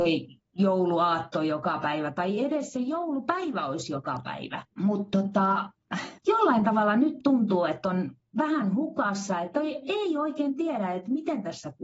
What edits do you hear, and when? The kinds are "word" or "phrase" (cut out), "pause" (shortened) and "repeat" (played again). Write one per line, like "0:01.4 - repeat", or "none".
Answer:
0:04.7 - pause
0:06.2 - pause